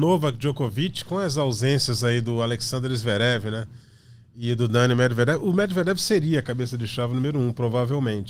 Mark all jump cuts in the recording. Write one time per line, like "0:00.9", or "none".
none